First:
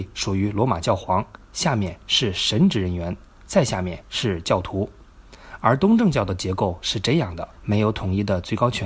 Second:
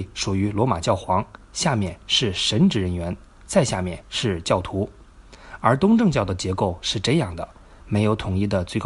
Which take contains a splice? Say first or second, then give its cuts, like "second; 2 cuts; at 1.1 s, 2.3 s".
first; 1 cut; at 7.5 s